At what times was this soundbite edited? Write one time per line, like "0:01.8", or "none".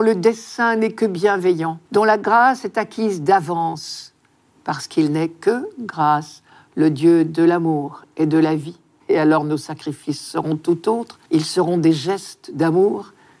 0:01.9
0:09.0
0:11.3